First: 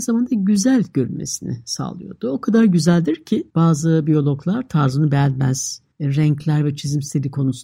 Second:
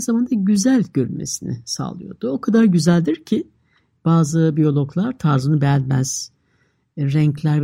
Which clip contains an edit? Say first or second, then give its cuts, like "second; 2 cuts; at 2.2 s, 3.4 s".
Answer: first; 2 cuts; at 3.5 s, 5.9 s